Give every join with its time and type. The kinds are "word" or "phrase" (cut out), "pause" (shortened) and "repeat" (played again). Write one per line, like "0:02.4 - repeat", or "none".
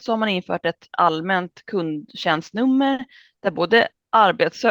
none